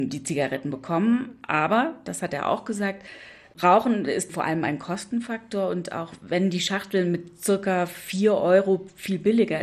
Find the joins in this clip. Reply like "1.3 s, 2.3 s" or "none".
none

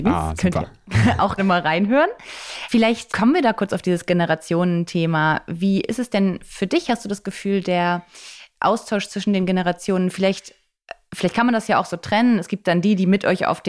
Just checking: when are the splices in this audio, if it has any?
1.4 s, 3.1 s

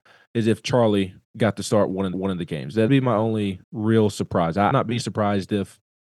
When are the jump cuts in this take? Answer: 1.2 s, 2.1 s, 2.9 s, 3.6 s, 4.7 s

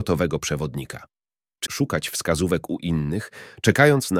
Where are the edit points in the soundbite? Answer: 1.6 s

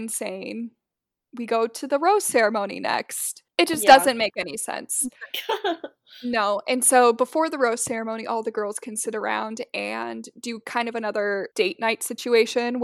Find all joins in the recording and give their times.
3.5 s, 11.5 s

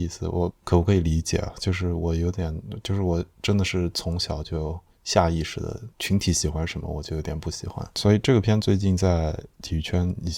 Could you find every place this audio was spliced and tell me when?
5.9 s

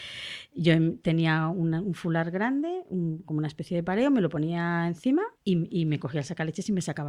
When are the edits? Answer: 5.4 s

